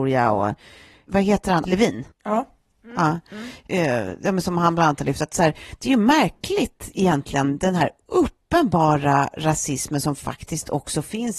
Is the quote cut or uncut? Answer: cut